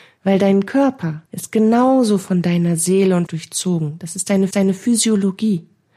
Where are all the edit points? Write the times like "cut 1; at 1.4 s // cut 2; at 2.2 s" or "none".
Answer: cut 1; at 1.3 s // cut 2; at 3.3 s // cut 3; at 4.5 s